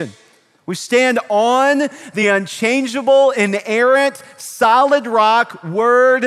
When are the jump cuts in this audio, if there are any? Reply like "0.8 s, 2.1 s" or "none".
none